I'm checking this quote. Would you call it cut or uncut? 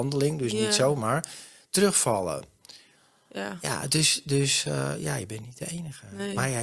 uncut